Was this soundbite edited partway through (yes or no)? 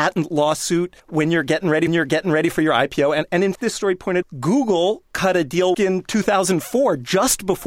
yes